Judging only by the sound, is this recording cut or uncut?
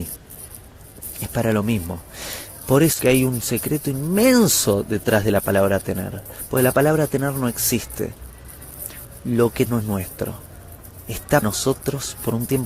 cut